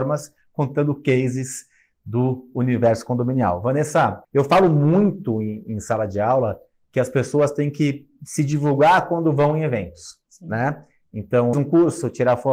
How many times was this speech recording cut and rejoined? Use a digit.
2